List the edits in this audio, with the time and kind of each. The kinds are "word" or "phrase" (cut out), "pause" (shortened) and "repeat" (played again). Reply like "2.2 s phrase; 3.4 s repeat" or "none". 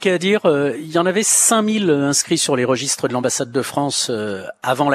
none